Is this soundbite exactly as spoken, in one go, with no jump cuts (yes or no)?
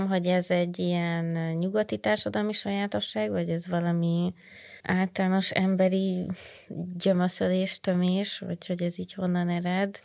no